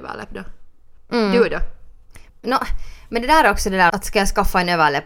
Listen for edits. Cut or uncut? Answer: cut